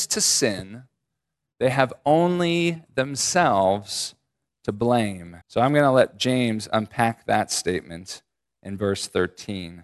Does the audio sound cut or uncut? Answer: cut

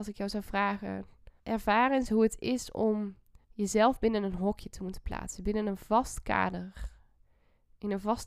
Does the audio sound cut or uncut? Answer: cut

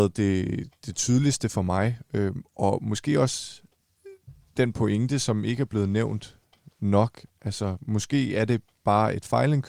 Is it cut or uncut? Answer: uncut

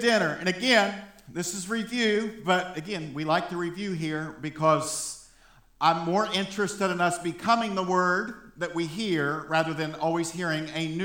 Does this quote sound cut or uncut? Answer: uncut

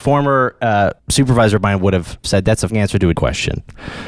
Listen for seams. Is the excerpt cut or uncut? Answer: cut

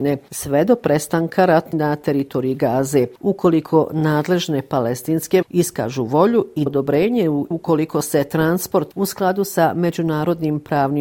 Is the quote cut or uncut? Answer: cut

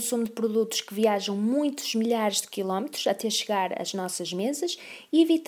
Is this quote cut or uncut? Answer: uncut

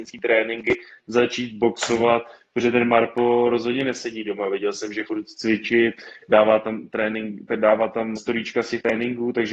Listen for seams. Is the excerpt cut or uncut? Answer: cut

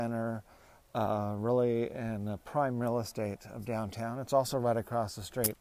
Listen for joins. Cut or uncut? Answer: uncut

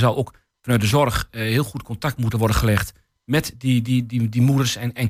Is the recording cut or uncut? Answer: uncut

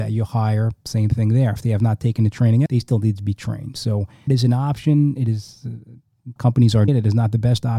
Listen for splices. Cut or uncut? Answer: cut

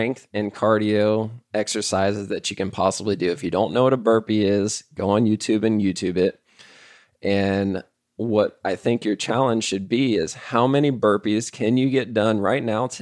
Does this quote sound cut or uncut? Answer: uncut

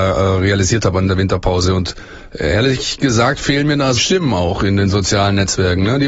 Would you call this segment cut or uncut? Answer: cut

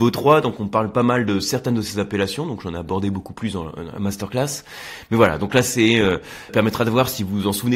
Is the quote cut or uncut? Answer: cut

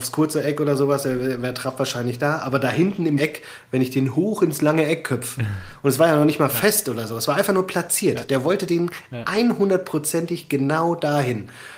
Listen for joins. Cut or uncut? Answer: cut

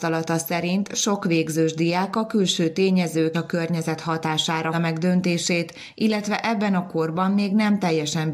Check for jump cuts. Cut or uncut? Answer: cut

